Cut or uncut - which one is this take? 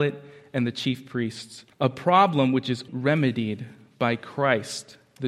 cut